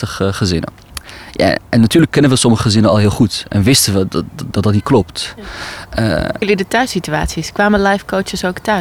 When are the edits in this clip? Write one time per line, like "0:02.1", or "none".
0:04.5
0:06.4